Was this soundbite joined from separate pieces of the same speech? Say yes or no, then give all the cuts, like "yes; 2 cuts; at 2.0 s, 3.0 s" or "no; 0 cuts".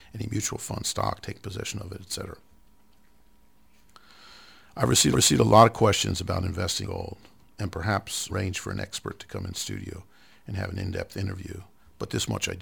yes; 3 cuts; at 5.1 s, 6.8 s, 8.3 s